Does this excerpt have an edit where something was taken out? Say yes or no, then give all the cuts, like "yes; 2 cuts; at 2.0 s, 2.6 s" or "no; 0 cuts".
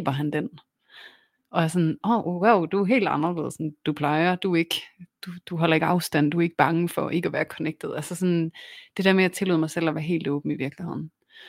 no; 0 cuts